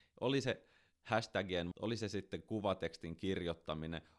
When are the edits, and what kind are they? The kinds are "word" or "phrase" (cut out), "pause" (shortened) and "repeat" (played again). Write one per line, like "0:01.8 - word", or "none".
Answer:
0:01.7 - word